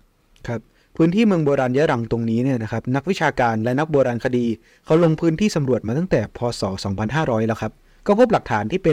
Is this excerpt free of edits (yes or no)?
yes